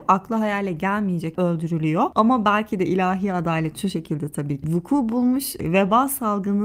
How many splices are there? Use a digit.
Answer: 2